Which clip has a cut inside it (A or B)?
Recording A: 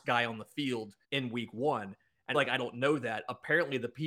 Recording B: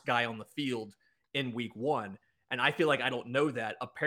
A